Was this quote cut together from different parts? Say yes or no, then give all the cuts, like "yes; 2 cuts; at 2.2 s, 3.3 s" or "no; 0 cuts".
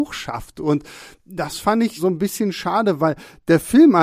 yes; 1 cut; at 2.0 s